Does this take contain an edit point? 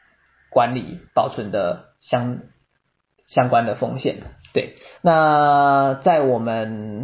yes; 2 cuts; at 1.1 s, 5.0 s

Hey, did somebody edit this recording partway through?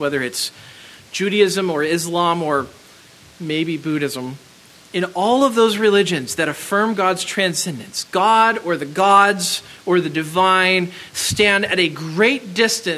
no; 0 cuts

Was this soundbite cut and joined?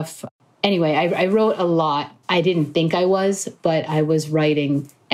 yes; 1 cut; at 2.2 s

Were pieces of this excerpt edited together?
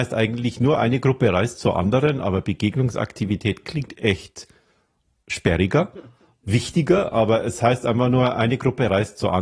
no; 0 cuts

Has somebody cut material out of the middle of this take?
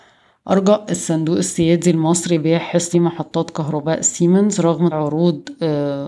yes; 2 cuts; at 2.9 s, 4.9 s

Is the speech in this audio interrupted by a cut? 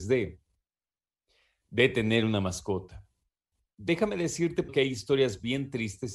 no; 0 cuts

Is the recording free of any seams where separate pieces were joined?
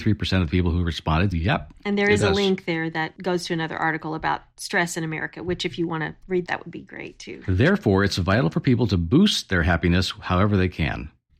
no; 2 cuts; at 1.3 s, 6.5 s

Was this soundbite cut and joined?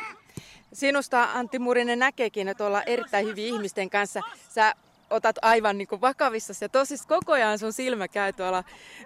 yes; 3 cuts; at 2.6 s, 5.3 s, 7.0 s

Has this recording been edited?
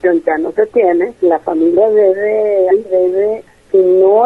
yes; 2 cuts; at 1.2 s, 2.7 s

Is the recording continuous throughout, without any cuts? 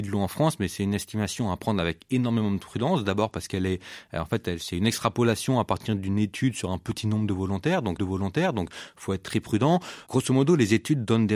no; 1 cut; at 8.0 s

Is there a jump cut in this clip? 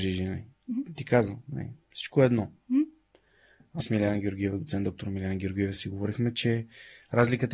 yes; 1 cut; at 3.8 s

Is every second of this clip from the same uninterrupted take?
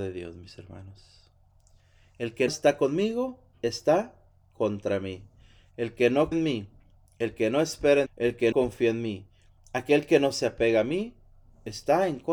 no; 4 cuts; at 2.5 s, 6.3 s, 8.1 s, 8.5 s

